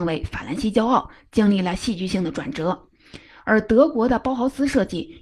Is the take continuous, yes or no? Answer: yes